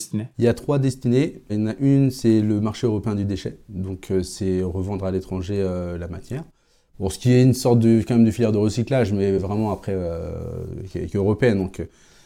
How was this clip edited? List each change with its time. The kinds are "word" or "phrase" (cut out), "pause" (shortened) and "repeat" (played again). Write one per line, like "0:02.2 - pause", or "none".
none